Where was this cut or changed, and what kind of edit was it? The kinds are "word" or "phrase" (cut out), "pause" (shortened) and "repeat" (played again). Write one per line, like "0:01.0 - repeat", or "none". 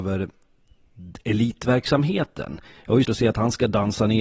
0:03.0 - word